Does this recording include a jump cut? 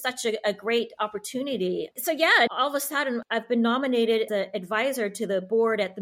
yes; 2 cuts; at 2.5 s, 4.3 s

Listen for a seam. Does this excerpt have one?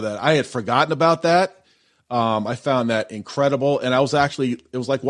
no; 0 cuts

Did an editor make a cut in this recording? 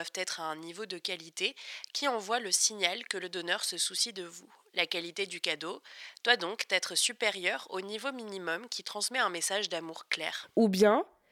no; 0 cuts

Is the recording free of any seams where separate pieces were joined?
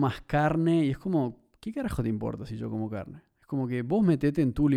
yes; 0 cuts

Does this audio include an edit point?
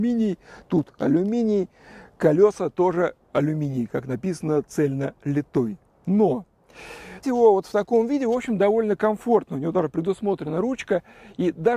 yes; 2 cuts; at 3.2 s, 7.2 s

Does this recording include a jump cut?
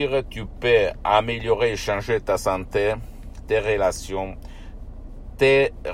no; 0 cuts

